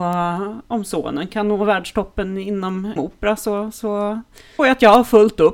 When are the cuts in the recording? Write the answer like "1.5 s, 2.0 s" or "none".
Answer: 3.0 s, 4.6 s

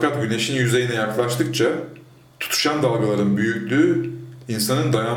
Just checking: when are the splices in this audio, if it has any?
none

